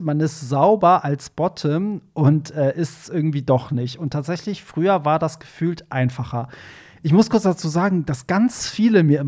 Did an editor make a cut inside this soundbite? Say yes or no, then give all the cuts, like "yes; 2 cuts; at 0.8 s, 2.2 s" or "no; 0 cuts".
no; 0 cuts